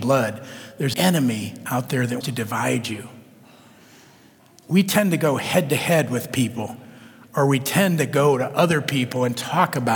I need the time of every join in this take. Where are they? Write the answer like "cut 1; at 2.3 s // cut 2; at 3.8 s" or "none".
cut 1; at 0.9 s // cut 2; at 2.2 s